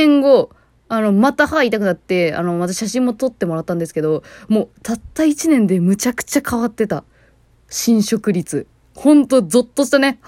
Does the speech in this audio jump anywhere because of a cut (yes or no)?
no